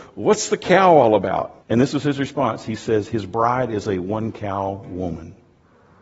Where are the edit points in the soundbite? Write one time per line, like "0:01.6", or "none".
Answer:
0:01.6